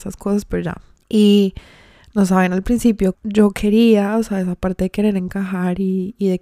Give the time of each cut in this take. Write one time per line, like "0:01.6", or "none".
0:03.1